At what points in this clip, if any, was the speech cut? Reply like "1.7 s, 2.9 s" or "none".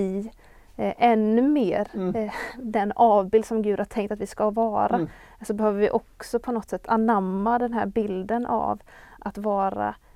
none